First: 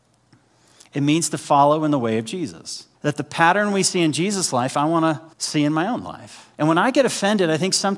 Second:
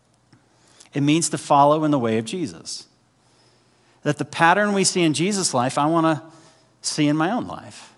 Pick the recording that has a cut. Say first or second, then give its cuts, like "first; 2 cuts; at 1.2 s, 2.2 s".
first; 3 cuts; at 2.9 s, 5.3 s, 6.5 s